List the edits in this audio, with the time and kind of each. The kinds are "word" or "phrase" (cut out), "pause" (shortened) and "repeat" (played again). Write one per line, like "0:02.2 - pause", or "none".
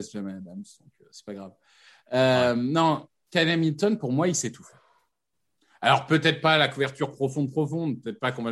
none